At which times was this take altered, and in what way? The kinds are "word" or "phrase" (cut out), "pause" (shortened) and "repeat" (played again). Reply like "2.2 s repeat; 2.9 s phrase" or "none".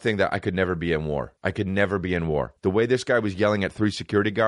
1.4 s pause; 2.6 s pause